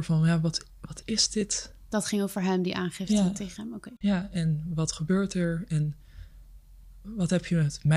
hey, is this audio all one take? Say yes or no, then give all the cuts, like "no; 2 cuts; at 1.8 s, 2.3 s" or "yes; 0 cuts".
yes; 0 cuts